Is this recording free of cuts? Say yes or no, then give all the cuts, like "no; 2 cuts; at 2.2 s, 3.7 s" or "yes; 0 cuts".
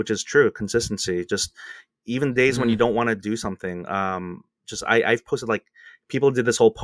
yes; 0 cuts